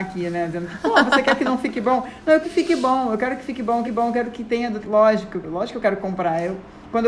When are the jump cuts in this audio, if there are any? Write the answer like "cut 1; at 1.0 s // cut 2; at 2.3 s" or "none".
cut 1; at 2.4 s // cut 2; at 3.8 s // cut 3; at 4.8 s // cut 4; at 5.4 s